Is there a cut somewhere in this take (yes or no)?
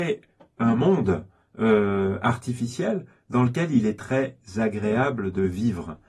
no